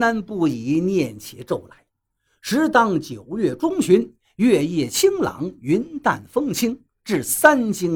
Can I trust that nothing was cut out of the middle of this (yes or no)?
yes